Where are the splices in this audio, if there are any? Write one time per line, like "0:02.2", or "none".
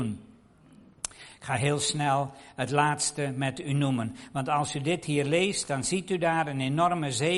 none